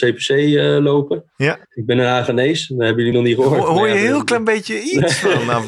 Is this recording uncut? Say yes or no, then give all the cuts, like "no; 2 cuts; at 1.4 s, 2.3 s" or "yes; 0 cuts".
no; 2 cuts; at 1.6 s, 3.1 s